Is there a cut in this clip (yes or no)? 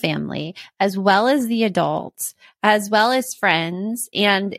no